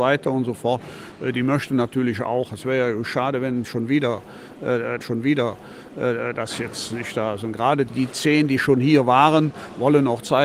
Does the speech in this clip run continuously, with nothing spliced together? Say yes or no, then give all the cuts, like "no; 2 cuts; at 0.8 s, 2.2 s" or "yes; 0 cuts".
no; 2 cuts; at 5.0 s, 7.9 s